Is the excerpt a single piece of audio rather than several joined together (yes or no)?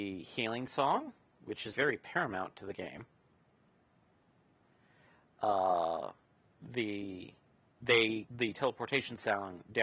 no